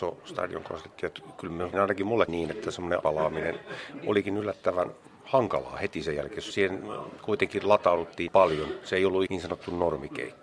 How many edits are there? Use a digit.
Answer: 6